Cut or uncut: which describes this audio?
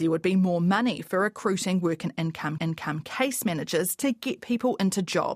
cut